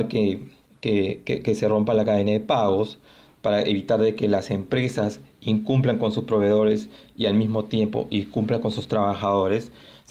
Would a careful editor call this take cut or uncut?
uncut